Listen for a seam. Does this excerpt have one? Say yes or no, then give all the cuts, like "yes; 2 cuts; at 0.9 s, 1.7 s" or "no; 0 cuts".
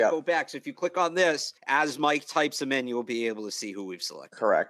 yes; 1 cut; at 1.6 s